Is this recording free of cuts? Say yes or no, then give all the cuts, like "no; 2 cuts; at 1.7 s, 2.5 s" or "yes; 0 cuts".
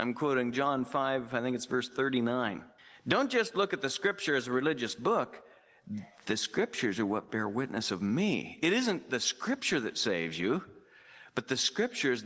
no; 1 cut; at 2.8 s